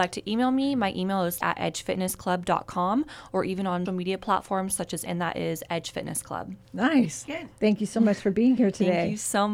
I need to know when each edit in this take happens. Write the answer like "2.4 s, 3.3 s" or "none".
1.4 s, 3.9 s, 5.1 s, 6.6 s

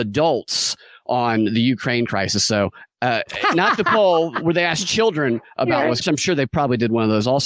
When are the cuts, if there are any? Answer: 6.0 s

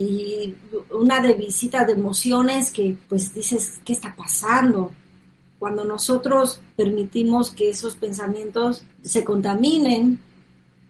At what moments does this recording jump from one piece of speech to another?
3.0 s, 3.8 s, 6.7 s, 8.9 s

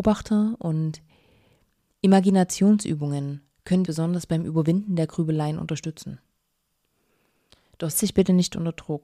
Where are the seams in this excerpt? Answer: 3.8 s, 7.9 s

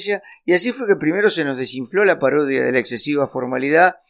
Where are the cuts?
none

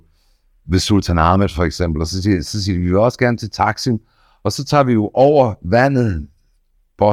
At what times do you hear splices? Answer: none

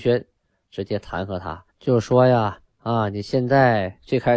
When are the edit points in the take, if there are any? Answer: 1.7 s

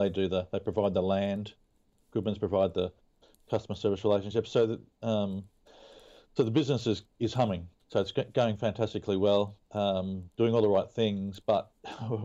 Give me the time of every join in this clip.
none

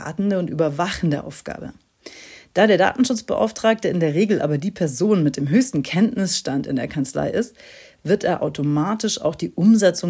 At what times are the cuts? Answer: none

